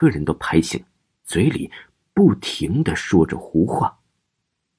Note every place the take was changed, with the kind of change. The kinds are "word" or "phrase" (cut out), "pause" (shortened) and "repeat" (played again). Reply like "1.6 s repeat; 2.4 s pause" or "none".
none